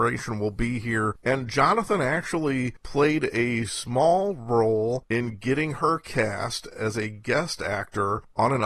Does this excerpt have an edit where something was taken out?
no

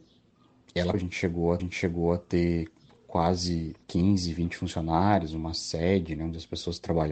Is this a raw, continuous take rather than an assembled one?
no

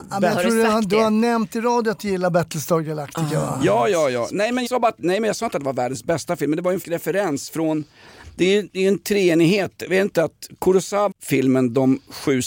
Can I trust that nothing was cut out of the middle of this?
no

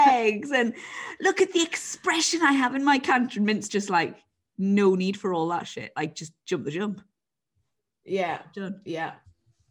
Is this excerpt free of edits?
yes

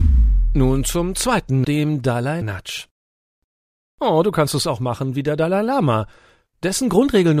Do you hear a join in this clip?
yes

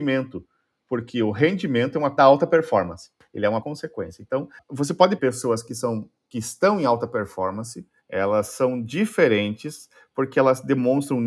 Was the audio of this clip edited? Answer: yes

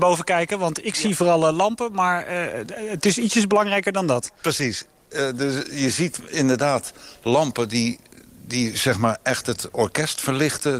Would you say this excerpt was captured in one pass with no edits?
yes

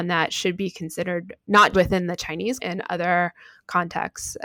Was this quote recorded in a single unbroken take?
no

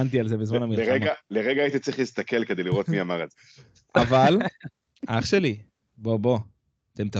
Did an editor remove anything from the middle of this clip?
no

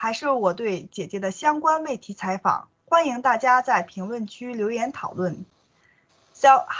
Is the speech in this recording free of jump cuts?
yes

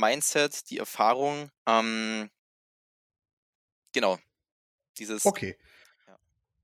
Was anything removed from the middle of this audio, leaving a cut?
yes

